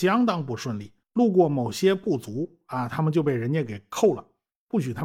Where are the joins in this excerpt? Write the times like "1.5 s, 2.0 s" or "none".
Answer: 1.0 s